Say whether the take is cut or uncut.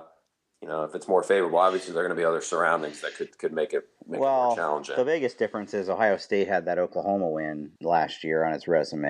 cut